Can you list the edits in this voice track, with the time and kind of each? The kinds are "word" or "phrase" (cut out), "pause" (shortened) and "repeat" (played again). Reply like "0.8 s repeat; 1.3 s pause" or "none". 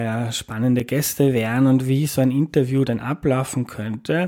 none